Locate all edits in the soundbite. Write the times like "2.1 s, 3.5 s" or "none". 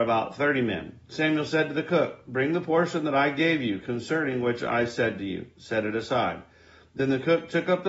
none